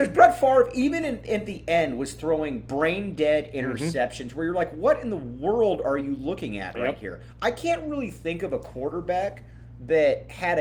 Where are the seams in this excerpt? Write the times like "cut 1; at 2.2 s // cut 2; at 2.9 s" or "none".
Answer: none